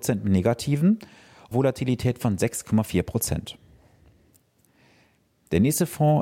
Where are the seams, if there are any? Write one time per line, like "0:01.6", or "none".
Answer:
0:01.5